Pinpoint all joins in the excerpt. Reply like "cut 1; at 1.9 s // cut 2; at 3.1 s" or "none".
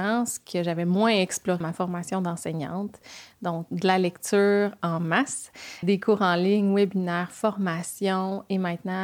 cut 1; at 1.6 s // cut 2; at 3.7 s // cut 3; at 5.8 s